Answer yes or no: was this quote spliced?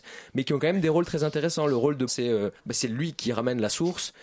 yes